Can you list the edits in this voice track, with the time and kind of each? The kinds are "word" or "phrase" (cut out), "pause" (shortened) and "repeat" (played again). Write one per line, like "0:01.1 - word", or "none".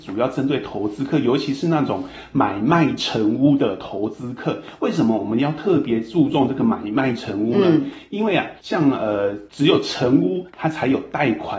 0:08.6 - pause